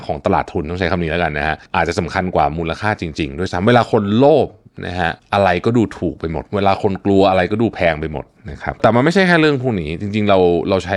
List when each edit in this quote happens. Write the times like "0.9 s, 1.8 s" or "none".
5.2 s, 6.5 s